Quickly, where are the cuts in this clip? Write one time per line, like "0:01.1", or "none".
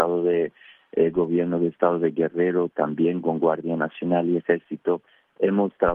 none